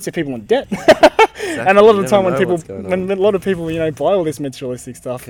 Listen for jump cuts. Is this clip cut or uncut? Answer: uncut